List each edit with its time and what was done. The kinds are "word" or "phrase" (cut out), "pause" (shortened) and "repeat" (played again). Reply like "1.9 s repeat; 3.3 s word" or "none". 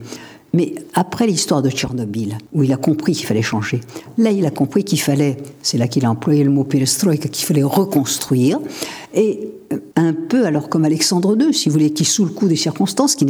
2.5 s pause; 9.9 s pause